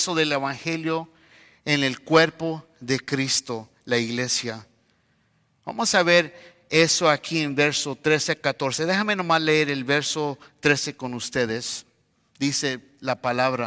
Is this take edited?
no; 0 cuts

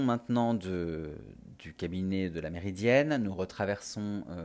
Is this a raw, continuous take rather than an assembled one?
yes; 0 cuts

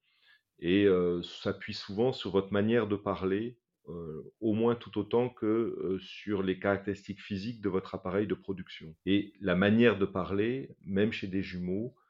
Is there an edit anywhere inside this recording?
yes; 1 cut; at 9.0 s

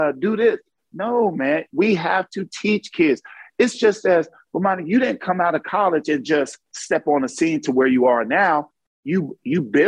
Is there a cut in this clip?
no; 0 cuts

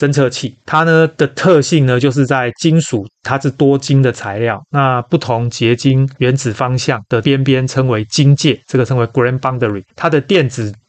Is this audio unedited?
no; 1 cut; at 9.9 s

